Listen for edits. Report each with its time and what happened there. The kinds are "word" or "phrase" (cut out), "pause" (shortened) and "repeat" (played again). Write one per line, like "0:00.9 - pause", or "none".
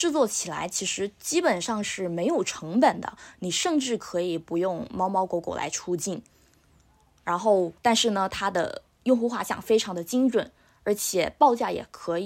0:07.8 - pause